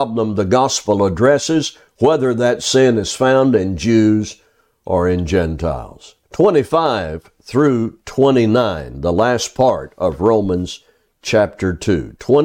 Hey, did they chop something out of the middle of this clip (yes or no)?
yes